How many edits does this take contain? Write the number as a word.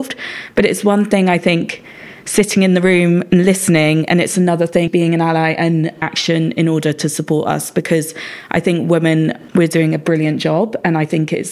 two